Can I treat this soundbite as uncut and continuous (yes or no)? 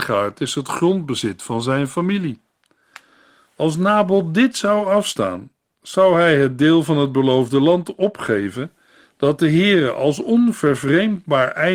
yes